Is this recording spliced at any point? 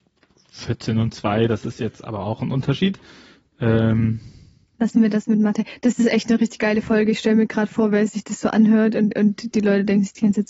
yes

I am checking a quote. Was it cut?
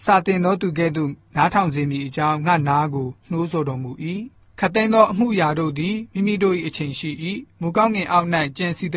yes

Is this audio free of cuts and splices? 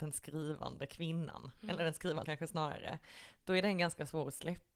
no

